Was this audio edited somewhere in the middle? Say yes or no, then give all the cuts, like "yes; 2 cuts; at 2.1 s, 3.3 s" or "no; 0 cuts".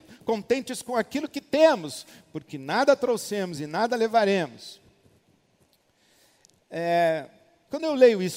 no; 0 cuts